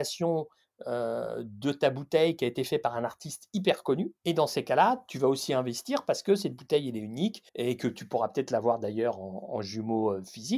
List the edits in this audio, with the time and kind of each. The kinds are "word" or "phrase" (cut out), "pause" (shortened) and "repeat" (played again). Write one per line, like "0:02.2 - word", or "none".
0:04.2 - pause
0:07.5 - pause